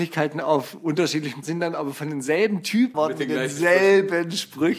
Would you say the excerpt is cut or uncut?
cut